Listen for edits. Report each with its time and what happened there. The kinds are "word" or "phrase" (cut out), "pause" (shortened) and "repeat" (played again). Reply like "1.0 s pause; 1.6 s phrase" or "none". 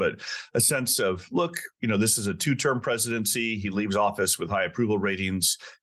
none